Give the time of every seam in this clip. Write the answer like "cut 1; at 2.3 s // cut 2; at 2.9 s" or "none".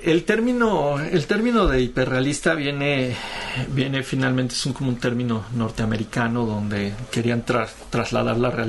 none